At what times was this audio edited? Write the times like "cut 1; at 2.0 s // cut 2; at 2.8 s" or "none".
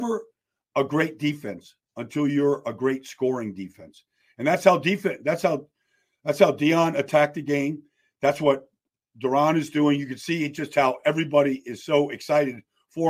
none